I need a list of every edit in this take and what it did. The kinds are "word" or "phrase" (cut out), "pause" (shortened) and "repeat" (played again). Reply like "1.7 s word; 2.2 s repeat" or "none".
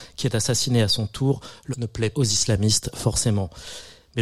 1.7 s word; 2.1 s word